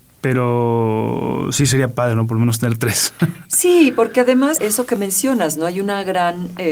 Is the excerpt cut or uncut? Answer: uncut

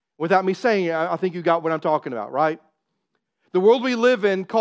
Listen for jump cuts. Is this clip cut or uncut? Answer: uncut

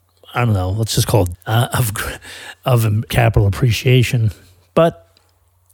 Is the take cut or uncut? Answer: cut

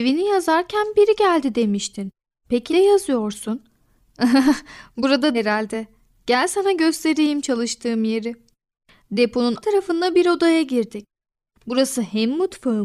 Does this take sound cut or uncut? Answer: cut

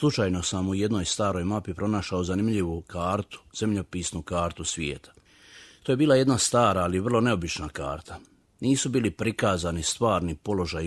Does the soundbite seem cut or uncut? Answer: uncut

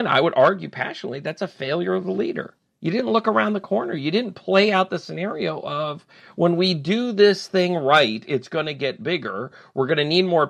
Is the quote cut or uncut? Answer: uncut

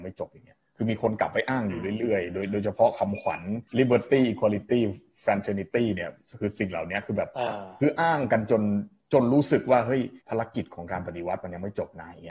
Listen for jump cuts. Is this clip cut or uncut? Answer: cut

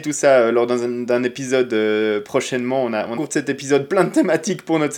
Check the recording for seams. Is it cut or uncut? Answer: cut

